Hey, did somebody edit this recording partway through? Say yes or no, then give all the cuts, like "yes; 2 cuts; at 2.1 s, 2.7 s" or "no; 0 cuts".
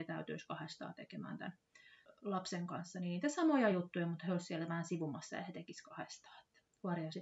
no; 0 cuts